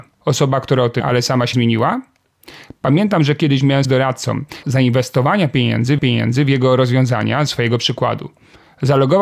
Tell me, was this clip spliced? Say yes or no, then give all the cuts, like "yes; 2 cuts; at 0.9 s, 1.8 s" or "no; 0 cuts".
yes; 6 cuts; at 1.0 s, 1.5 s, 3.8 s, 4.6 s, 6.0 s, 7.5 s